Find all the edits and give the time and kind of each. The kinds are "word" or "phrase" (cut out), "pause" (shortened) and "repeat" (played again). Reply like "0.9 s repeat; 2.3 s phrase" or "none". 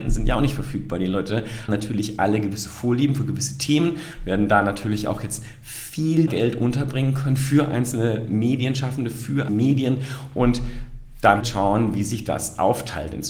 1.7 s word; 6.3 s word; 9.5 s word; 11.4 s word